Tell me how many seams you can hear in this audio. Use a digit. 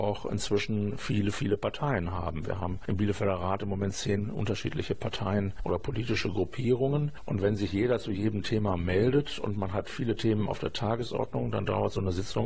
0